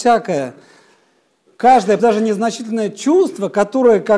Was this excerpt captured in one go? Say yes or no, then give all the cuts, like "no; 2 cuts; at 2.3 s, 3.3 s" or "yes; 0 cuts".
no; 1 cut; at 2.0 s